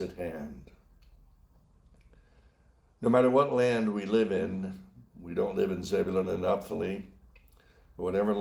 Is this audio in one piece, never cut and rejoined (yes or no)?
yes